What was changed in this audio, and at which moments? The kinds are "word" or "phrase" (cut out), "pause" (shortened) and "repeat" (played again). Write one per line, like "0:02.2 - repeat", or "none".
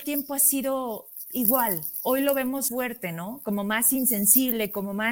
0:02.7 - word